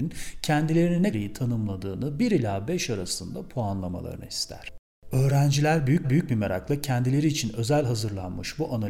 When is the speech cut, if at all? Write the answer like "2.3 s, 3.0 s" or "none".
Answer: 1.1 s, 6.0 s